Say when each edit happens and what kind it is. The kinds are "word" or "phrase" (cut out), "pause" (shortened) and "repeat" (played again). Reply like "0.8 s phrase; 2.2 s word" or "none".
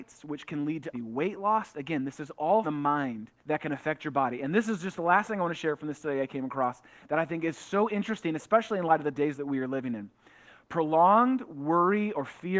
0.9 s word; 2.6 s phrase; 3.4 s pause